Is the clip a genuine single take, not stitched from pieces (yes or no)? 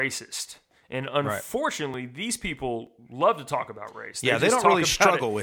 yes